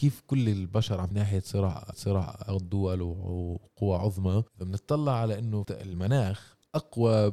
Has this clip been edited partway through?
yes; 4 cuts; at 1.1 s, 1.9 s, 4.5 s, 5.6 s

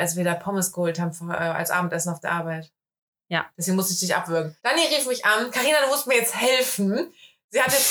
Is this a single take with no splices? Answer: no; 1 cut; at 4.6 s

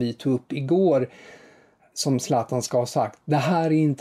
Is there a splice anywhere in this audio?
no; 0 cuts

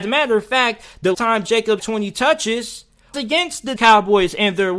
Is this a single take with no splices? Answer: no; 5 cuts; at 1.1 s, 1.5 s, 1.8 s, 3.1 s, 3.8 s

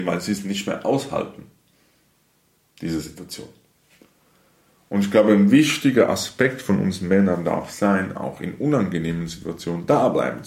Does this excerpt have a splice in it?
no; 0 cuts

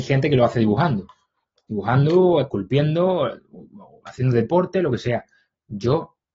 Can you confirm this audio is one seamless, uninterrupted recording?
yes; 0 cuts

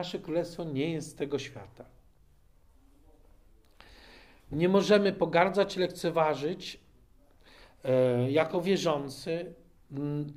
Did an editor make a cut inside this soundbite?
no; 0 cuts

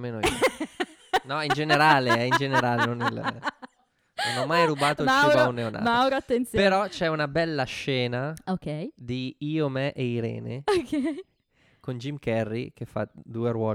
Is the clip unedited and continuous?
yes; 0 cuts

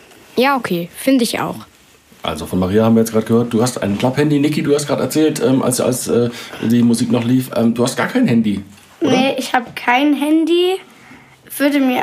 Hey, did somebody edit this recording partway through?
no; 0 cuts

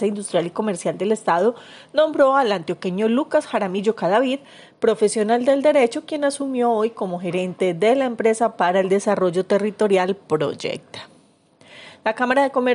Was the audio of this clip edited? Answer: no; 0 cuts

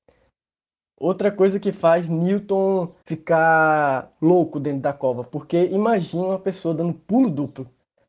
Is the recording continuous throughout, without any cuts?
no; 1 cut; at 3.0 s

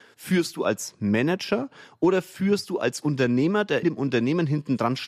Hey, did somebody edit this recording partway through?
yes; 1 cut; at 3.8 s

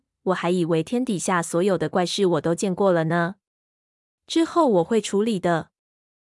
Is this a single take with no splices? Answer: yes; 0 cuts

